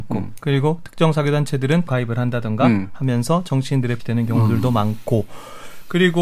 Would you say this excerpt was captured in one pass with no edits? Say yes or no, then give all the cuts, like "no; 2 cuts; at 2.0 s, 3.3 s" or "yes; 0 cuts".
no; 2 cuts; at 1.9 s, 4.0 s